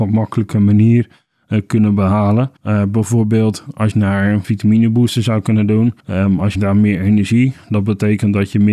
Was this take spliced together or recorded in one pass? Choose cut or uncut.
cut